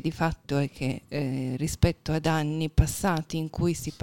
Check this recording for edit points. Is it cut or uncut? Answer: uncut